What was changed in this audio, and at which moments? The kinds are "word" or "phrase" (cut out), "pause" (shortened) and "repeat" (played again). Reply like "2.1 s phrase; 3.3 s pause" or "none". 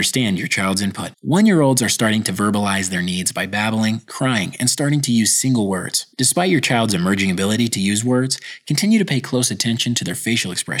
1.1 s pause; 6.1 s pause